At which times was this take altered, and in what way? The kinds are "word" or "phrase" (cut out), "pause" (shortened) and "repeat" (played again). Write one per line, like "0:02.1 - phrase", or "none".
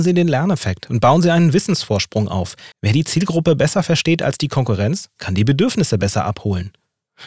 0:02.7 - pause